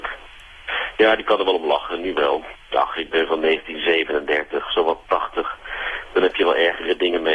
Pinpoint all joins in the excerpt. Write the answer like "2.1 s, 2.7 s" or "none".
2.6 s